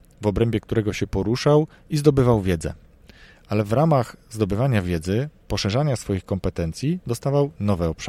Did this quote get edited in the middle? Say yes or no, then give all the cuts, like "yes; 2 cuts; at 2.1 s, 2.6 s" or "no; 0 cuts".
no; 0 cuts